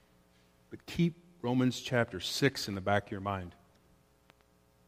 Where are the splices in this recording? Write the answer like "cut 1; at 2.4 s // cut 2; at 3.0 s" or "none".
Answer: none